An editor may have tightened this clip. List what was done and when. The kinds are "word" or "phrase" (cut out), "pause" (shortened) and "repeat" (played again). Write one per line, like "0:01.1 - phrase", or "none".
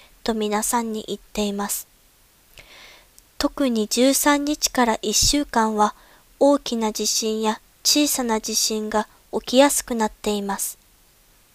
none